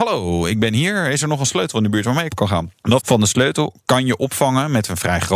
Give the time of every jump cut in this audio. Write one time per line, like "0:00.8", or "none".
0:02.3
0:03.0